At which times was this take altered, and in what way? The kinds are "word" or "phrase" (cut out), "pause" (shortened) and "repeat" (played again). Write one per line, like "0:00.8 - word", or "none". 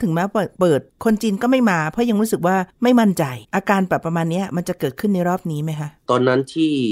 0:03.4 - pause